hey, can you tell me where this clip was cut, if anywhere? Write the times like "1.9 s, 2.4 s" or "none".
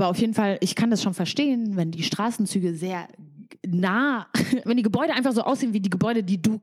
4.6 s